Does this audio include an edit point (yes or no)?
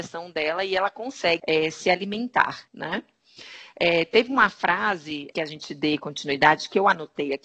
yes